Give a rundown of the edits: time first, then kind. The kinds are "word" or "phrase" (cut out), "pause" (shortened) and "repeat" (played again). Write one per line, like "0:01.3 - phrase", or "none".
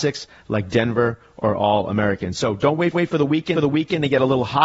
0:02.9 - repeat
0:03.5 - repeat

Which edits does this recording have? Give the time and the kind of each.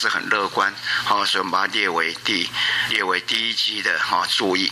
0:02.9 - word

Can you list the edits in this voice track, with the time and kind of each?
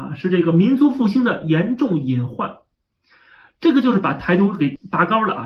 none

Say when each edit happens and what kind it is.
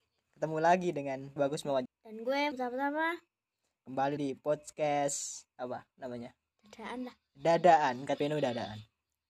0:01.4 - word
0:01.9 - word
0:02.5 - word
0:04.2 - word
0:05.5 - pause
0:06.5 - pause
0:08.2 - word

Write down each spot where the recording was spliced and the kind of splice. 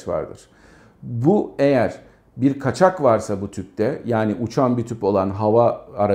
none

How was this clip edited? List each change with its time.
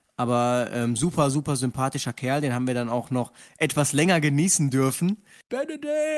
none

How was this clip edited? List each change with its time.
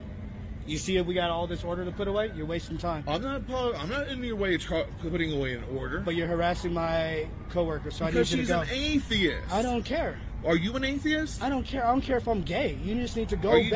none

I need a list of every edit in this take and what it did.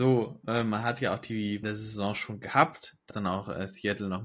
0:01.6 - phrase
0:03.1 - word

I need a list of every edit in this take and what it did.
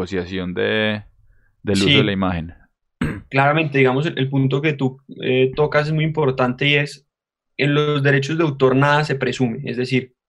none

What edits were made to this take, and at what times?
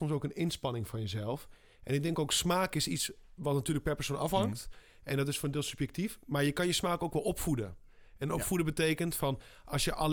none

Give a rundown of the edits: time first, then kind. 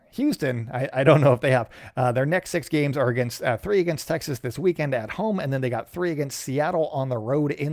none

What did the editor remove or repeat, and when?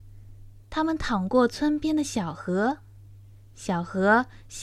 none

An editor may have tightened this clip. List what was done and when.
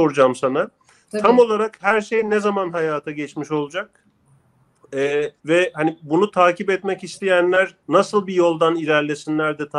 0:05.4 - pause
0:07.8 - pause

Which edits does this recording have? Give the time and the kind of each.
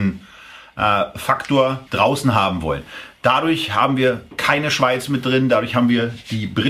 0:01.9 - word

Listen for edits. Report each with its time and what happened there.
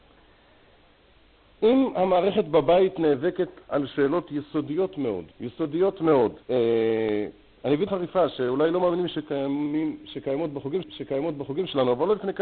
0:05.3 - pause
0:06.4 - pause
0:07.9 - word
0:10.8 - repeat

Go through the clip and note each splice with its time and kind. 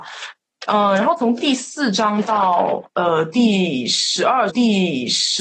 0:02.9 - pause
0:04.5 - repeat

